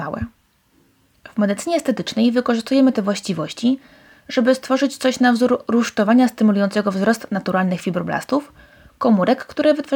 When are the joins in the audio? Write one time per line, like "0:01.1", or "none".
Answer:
none